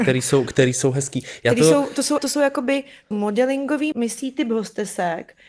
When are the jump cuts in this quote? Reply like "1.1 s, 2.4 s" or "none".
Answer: 2.2 s, 3.1 s, 3.9 s